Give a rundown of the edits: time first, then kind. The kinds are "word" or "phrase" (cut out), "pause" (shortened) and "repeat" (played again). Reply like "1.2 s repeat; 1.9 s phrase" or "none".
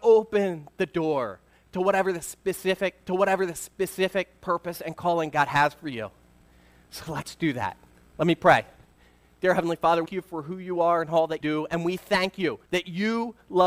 3.1 s repeat; 10.1 s phrase; 11.4 s word; 12.7 s pause